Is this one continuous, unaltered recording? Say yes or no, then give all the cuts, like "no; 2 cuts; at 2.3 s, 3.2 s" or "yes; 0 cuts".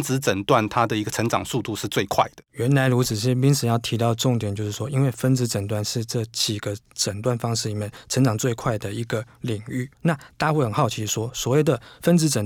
no; 1 cut; at 9.9 s